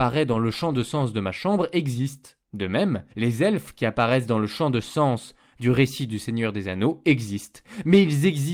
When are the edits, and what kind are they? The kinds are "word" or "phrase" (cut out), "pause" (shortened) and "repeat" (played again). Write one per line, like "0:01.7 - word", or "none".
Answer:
0:02.4 - pause
0:03.1 - pause